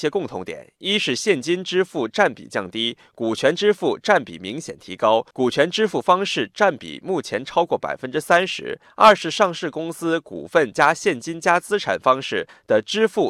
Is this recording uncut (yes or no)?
no